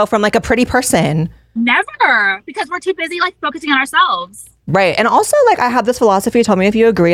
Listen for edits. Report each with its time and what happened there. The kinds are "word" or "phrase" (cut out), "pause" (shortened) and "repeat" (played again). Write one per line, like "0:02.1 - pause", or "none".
none